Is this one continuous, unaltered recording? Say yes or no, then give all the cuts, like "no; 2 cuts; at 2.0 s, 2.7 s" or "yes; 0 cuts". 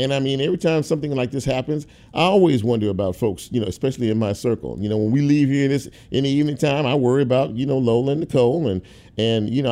yes; 0 cuts